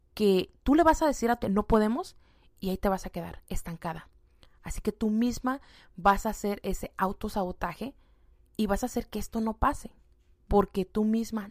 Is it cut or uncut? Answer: cut